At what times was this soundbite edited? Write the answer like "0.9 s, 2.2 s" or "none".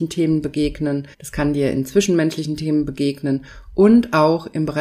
1.1 s

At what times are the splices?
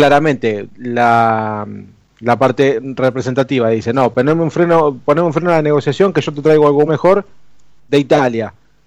6.9 s

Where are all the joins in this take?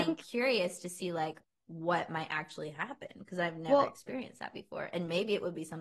none

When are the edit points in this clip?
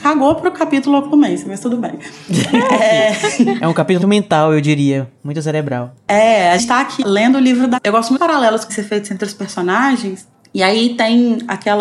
4.0 s, 6.6 s, 7.0 s, 7.8 s, 8.2 s, 8.7 s

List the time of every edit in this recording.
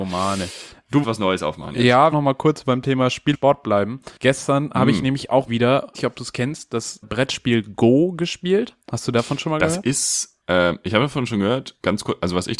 1.0 s, 2.1 s, 3.3 s, 4.2 s, 5.5 s, 5.9 s, 7.0 s, 8.8 s, 10.4 s

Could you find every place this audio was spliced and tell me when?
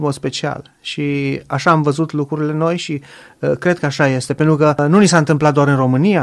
none

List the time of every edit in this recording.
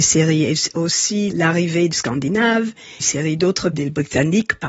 1.3 s, 1.9 s, 3.0 s, 3.7 s

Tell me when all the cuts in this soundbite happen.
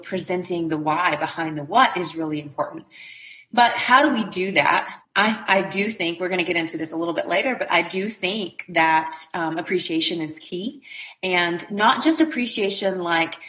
5.0 s

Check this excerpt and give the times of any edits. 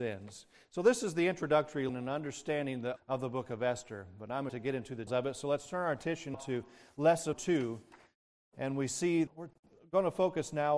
1.9 s, 3.0 s, 4.5 s, 5.1 s, 6.3 s, 7.3 s, 9.3 s

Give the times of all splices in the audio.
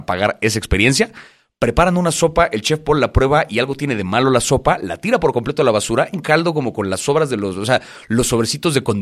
6.1 s

